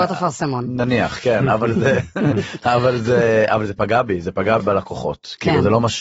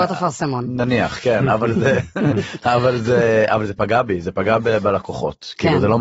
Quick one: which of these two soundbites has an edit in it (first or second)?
first